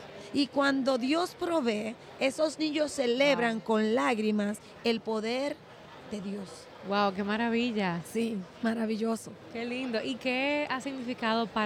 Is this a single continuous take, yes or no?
no